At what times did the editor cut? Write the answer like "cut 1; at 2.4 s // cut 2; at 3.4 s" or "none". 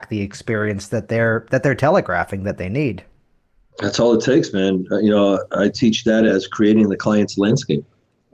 none